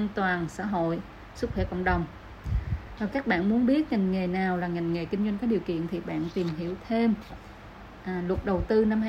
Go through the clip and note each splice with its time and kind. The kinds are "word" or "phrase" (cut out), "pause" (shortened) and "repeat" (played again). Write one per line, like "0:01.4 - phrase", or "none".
none